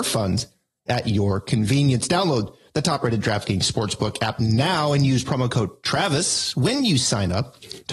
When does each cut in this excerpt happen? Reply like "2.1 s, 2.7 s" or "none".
none